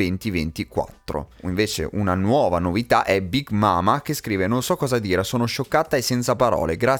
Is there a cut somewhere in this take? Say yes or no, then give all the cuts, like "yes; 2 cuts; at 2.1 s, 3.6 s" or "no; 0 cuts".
no; 0 cuts